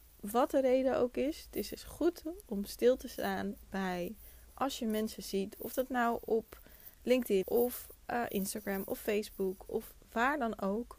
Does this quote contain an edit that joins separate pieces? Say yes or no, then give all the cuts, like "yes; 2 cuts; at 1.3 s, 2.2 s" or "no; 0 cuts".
yes; 1 cut; at 7.4 s